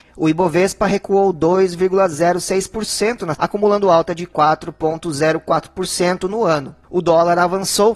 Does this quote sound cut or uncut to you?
cut